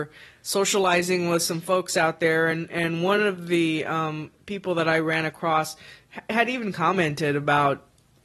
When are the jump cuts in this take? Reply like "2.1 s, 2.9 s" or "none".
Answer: none